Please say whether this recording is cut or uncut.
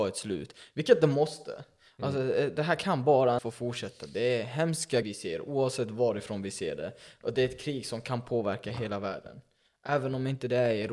cut